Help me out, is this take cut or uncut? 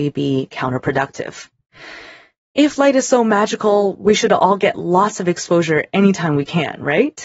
uncut